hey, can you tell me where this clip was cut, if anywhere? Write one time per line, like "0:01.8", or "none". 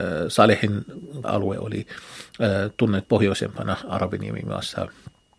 0:01.2
0:03.0